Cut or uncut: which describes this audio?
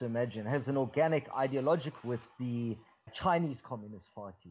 cut